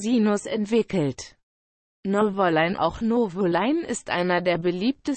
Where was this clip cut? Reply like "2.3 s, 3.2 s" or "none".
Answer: 2.8 s